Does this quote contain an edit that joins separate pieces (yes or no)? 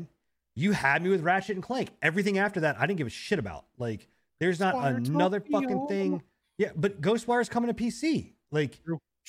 no